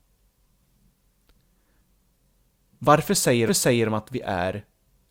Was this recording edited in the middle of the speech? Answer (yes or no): yes